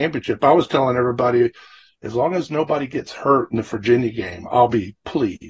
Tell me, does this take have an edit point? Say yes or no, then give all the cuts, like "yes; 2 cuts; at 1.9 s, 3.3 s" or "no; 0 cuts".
no; 0 cuts